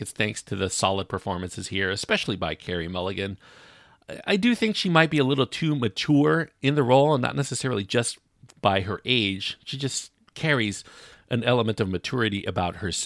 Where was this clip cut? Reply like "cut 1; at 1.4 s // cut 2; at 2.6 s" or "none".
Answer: none